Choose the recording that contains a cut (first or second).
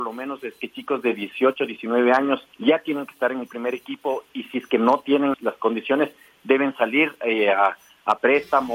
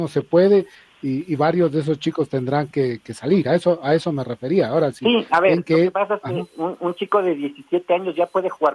first